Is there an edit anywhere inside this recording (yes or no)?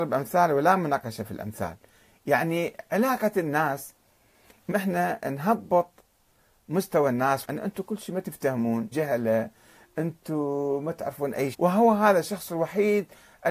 yes